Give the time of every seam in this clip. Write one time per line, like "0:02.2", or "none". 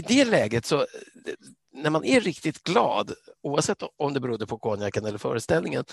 0:03.4